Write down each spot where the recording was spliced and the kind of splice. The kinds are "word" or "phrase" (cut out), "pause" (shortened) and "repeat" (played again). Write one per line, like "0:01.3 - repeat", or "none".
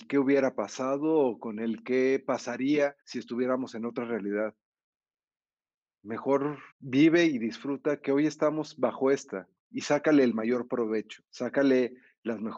0:03.0 - pause
0:06.7 - pause
0:11.3 - pause